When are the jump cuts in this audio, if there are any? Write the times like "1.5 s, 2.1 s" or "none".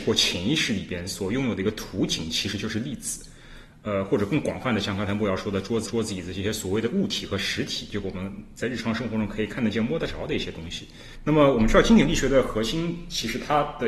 5.9 s